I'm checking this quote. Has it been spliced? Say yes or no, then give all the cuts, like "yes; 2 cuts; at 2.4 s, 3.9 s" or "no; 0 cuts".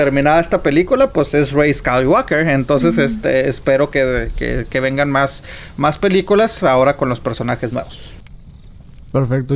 no; 0 cuts